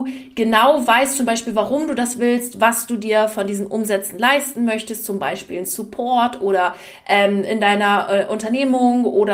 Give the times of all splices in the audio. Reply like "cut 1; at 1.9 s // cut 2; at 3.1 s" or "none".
none